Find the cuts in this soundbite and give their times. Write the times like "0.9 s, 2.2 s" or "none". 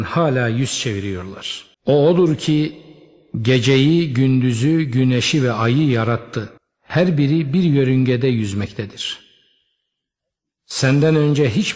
1.7 s, 6.6 s

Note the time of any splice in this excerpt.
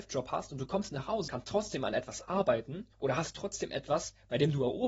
1.3 s, 2.9 s

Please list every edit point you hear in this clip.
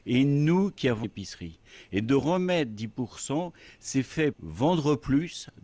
1.0 s, 4.3 s

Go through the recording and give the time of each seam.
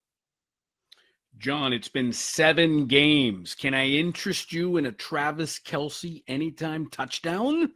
none

